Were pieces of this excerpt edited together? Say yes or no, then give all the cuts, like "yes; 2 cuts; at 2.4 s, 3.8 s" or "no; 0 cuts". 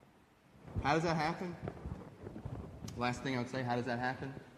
no; 0 cuts